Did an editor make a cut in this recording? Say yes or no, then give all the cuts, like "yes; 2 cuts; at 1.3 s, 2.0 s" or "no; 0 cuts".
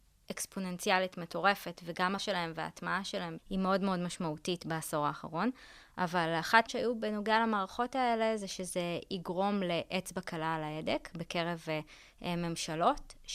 yes; 3 cuts; at 2.2 s, 3.4 s, 6.7 s